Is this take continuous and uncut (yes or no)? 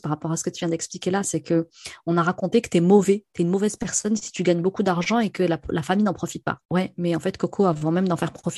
no